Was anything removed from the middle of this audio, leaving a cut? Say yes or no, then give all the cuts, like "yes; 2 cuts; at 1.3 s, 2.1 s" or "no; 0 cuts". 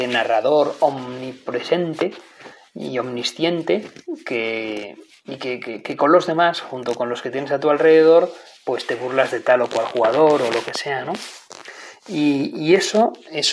no; 0 cuts